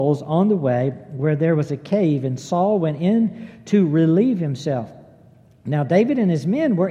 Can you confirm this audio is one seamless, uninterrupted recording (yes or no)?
yes